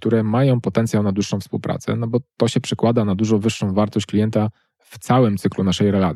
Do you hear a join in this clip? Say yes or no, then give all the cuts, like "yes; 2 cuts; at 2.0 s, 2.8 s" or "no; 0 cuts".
no; 0 cuts